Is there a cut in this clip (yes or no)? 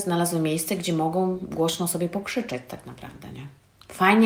no